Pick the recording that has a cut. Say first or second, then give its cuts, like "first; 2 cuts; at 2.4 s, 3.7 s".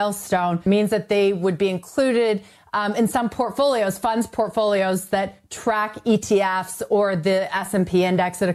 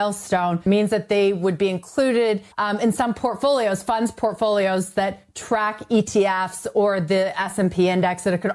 second; 1 cut; at 2.5 s